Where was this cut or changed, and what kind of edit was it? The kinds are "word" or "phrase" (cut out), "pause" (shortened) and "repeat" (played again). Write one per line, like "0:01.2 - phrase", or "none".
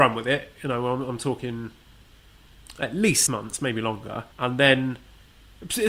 0:03.3 - word
0:04.3 - pause